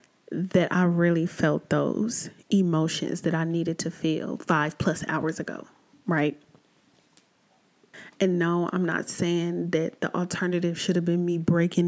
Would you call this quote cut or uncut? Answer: uncut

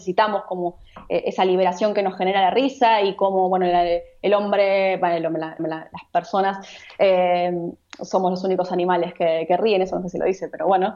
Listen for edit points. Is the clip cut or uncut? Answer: cut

